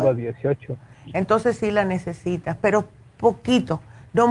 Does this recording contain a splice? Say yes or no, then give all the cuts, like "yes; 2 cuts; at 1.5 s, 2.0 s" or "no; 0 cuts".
no; 0 cuts